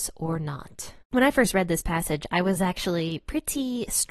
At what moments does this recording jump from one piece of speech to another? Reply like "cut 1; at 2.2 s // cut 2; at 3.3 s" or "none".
cut 1; at 1.0 s